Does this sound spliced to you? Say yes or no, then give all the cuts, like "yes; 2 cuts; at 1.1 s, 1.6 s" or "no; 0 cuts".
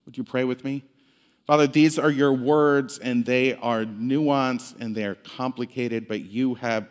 no; 0 cuts